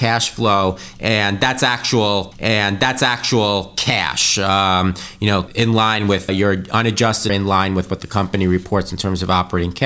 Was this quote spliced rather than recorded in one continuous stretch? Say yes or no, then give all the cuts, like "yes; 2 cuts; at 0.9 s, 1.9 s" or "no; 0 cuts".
yes; 4 cuts; at 2.3 s, 5.5 s, 6.3 s, 7.3 s